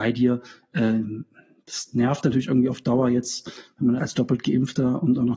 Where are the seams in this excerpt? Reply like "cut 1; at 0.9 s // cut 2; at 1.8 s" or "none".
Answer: cut 1; at 4.0 s